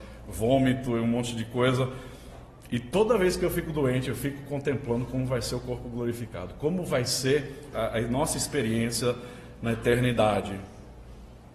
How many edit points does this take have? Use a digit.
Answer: 1